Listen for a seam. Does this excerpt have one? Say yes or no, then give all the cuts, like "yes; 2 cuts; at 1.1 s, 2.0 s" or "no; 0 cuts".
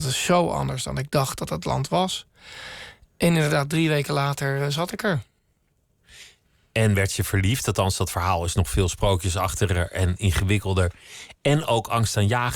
no; 0 cuts